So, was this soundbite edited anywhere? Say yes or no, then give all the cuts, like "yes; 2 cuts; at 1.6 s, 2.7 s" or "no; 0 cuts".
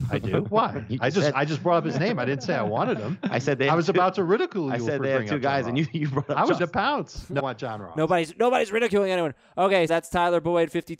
yes; 3 cuts; at 6.6 s, 7.4 s, 9.9 s